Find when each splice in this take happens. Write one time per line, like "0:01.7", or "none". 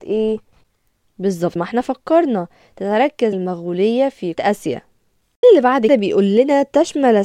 0:01.6
0:03.3
0:04.3
0:05.4
0:05.9